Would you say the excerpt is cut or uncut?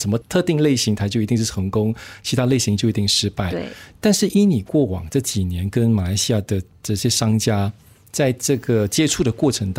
uncut